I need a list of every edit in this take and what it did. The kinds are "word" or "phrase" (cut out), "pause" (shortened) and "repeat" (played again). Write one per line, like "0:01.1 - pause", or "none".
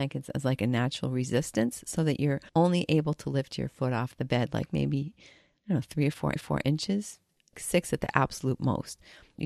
0:02.5 - pause
0:06.4 - repeat